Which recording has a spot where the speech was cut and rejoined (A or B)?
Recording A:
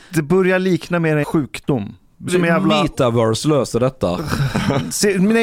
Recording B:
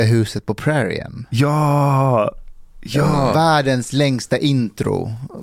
A